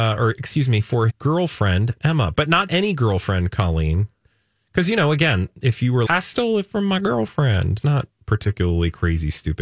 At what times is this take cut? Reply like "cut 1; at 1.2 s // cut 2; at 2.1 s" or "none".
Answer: cut 1; at 1.1 s // cut 2; at 2.7 s // cut 3; at 6.1 s // cut 4; at 7.8 s